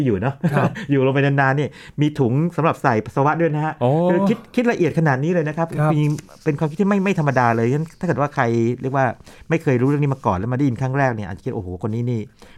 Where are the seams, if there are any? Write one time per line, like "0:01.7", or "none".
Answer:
none